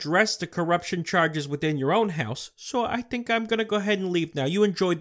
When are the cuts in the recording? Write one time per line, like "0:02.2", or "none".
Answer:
none